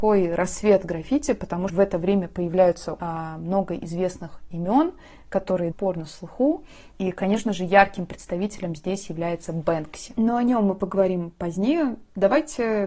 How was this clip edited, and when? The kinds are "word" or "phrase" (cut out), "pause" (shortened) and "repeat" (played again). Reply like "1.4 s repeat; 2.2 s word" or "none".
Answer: 1.7 s word; 3.0 s word; 5.7 s phrase; 6.9 s pause

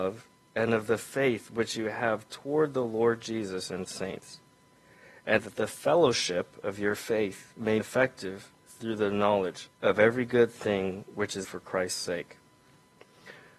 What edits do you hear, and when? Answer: 3.9 s phrase; 5.4 s phrase; 7.8 s word; 9.7 s pause; 11.4 s phrase

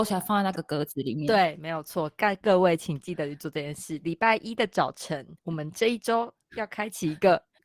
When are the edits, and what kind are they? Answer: 5.4 s pause

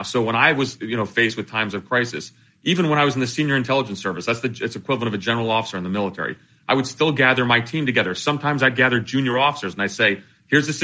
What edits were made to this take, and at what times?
none

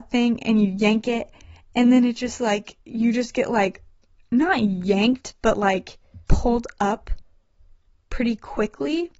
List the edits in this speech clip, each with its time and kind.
2.8 s pause; 6.2 s pause

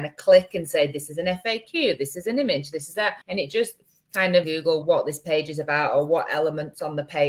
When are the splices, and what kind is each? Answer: 3.2 s pause; 4.4 s phrase; 4.8 s word

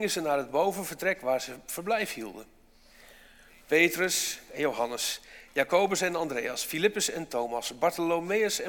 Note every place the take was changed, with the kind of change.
none

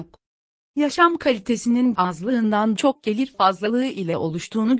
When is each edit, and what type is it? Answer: 1.9 s word; 2.7 s word

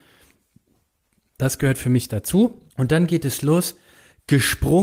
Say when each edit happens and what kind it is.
2.7 s pause

